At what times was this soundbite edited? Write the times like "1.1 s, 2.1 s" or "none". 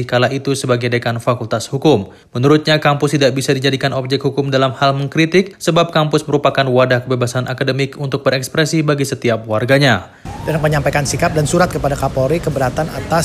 none